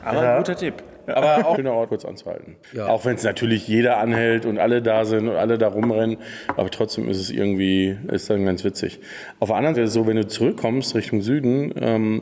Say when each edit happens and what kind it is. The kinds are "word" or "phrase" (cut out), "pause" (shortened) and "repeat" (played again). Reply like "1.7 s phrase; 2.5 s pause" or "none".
1.6 s phrase; 1.9 s word; 2.6 s pause; 8.1 s word; 9.7 s word